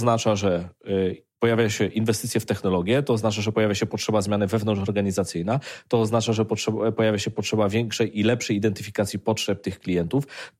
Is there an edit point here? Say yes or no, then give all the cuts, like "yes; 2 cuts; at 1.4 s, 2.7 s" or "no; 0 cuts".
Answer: no; 0 cuts